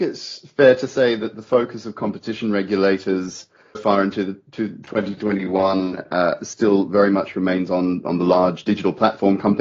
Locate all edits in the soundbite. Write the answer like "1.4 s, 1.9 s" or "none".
3.7 s